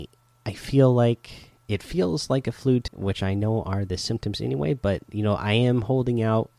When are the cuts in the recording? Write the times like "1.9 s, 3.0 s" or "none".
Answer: 1.6 s, 2.9 s